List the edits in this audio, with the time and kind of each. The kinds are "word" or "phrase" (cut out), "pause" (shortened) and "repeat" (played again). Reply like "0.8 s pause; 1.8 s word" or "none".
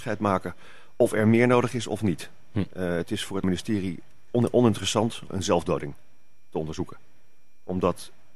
3.4 s word; 5.3 s word